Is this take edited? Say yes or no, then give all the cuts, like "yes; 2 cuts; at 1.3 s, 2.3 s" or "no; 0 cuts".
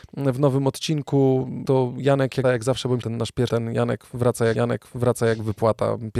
yes; 5 cuts; at 1.6 s, 2.4 s, 3.0 s, 3.5 s, 4.5 s